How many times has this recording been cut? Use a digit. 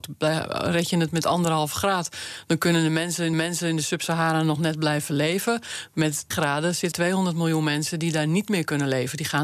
3